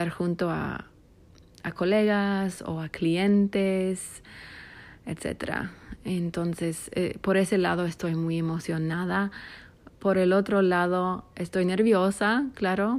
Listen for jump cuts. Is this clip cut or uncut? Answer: uncut